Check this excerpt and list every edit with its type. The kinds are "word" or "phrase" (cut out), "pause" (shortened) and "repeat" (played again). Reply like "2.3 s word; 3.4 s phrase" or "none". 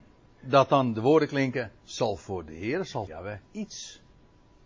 3.1 s word; 3.4 s pause

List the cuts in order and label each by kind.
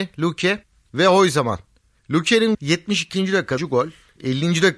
2.5 s word; 3.6 s word

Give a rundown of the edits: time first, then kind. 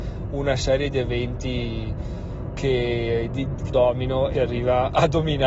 3.7 s word; 4.3 s word

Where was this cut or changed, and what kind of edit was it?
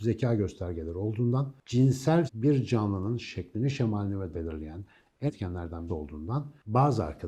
2.3 s word; 4.3 s word; 5.3 s word; 5.9 s word

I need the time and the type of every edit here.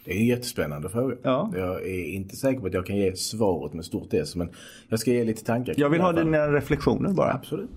none

